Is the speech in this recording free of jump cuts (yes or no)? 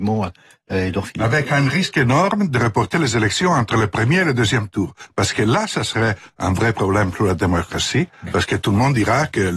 yes